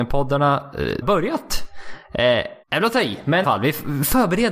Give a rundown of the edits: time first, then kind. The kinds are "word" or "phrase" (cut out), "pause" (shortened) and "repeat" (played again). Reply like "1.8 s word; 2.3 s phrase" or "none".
1.0 s phrase; 2.6 s pause; 3.4 s phrase